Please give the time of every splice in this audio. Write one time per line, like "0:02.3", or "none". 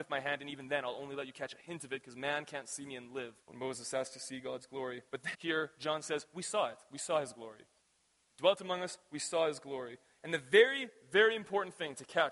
0:03.4
0:05.3
0:07.8